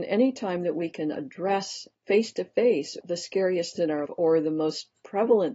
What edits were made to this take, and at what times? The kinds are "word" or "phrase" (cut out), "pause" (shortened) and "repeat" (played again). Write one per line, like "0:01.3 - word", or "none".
0:01.9 - pause
0:03.0 - word
0:03.8 - word
0:04.1 - word